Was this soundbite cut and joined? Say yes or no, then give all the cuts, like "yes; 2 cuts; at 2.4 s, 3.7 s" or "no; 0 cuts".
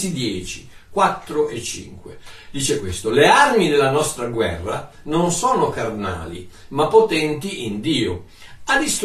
no; 0 cuts